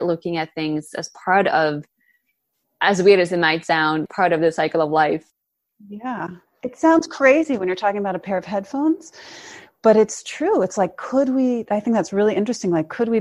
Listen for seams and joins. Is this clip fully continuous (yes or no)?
yes